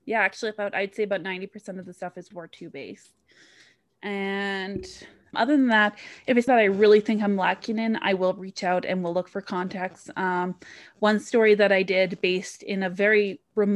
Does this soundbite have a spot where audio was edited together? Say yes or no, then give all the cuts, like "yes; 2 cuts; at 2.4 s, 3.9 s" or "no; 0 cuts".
yes; 3 cuts; at 2.3 s, 5.3 s, 6.5 s